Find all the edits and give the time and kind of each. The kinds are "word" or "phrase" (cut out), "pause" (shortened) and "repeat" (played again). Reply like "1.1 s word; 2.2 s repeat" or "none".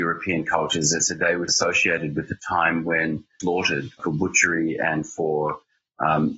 1.5 s word; 3.4 s phrase; 4.0 s word